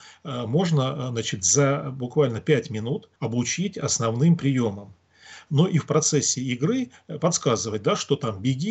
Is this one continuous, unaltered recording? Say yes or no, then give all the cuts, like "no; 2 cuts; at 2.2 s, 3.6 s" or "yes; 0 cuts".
no; 2 cuts; at 3.2 s, 7.2 s